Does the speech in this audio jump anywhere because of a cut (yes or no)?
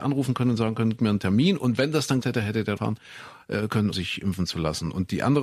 yes